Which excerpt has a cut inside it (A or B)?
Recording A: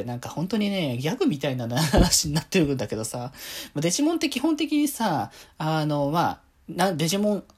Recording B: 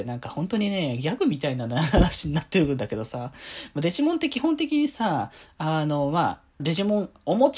B